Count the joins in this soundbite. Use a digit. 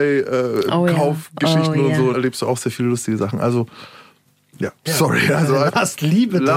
2